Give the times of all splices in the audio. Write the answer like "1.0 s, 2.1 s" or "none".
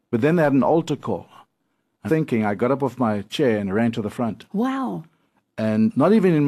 2.1 s